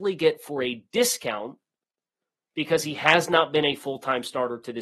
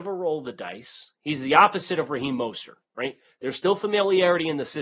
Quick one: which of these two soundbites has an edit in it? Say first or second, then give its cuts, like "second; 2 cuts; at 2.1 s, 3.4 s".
second; 1 cut; at 2.8 s